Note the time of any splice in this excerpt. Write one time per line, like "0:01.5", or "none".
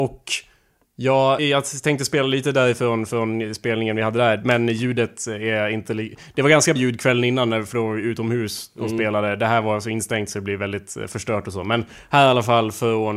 0:01.4
0:06.8